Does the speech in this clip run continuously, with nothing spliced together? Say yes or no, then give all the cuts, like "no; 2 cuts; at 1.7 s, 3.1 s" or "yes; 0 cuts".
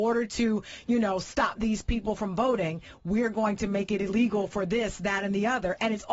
yes; 0 cuts